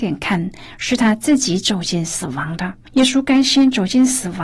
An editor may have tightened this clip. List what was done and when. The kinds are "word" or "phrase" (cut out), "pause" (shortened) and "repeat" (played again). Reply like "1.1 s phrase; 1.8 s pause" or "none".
2.8 s pause